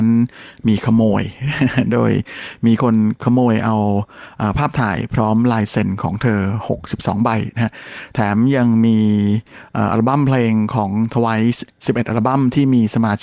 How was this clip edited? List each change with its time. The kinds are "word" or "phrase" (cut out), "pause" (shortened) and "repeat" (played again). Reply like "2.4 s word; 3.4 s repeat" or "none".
none